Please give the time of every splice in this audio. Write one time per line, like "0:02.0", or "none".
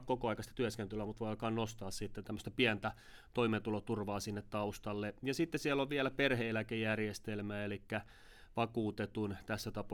0:02.2